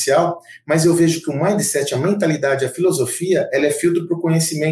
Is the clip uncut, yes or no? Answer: yes